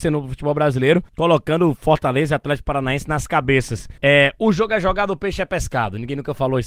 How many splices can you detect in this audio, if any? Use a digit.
2